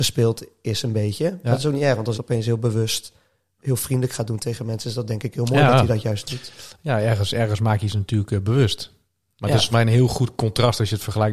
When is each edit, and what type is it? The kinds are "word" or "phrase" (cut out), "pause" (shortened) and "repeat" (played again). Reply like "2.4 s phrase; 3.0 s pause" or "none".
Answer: 2.1 s word; 9.7 s word